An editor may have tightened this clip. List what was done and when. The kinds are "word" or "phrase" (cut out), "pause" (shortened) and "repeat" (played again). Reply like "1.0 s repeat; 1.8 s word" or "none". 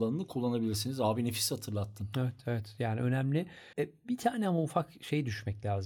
3.7 s pause